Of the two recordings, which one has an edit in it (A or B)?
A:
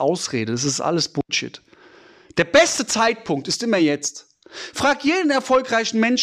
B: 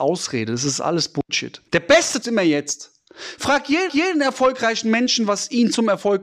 B